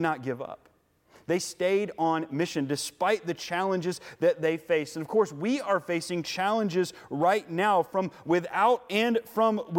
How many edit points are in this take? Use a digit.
0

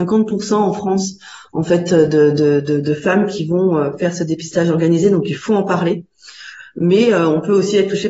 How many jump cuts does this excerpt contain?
0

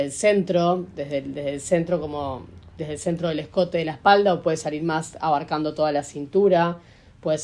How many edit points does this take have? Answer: 0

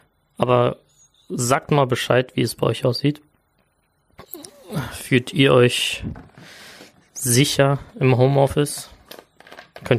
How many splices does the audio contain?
0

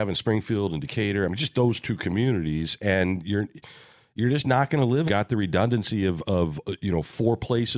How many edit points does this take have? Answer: 1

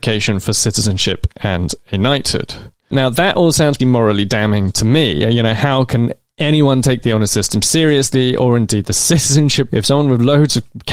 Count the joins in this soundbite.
2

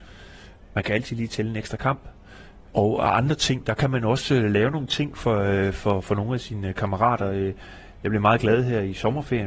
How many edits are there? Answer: 0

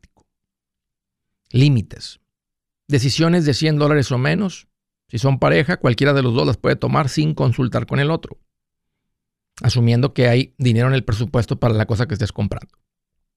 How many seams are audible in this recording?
0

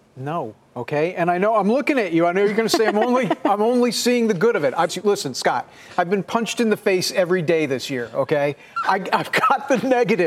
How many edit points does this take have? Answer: 1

